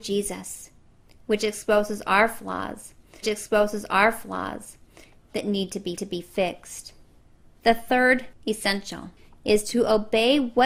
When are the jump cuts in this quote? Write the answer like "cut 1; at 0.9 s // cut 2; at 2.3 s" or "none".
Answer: cut 1; at 3.2 s // cut 2; at 6.0 s